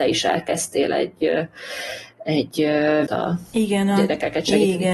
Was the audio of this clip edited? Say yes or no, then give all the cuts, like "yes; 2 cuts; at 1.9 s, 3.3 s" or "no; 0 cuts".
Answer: yes; 1 cut; at 3.1 s